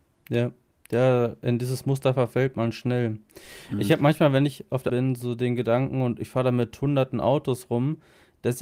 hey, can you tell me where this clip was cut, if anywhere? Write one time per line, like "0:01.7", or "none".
0:04.9